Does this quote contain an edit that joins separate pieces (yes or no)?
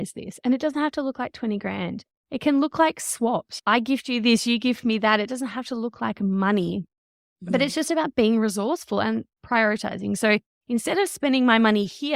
no